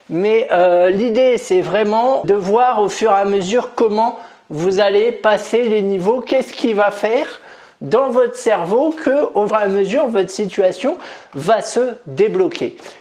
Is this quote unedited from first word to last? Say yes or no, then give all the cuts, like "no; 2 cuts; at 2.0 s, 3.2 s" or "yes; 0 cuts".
no; 2 cuts; at 2.2 s, 9.5 s